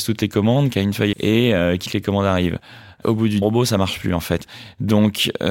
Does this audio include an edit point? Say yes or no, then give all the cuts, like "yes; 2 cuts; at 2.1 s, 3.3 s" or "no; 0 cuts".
yes; 3 cuts; at 1.1 s, 1.9 s, 3.4 s